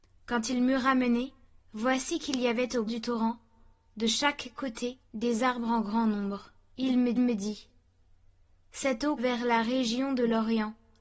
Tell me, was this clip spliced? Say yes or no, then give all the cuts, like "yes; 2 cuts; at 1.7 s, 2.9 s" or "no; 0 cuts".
yes; 6 cuts; at 1.4 s, 2.9 s, 5.0 s, 6.7 s, 7.2 s, 9.2 s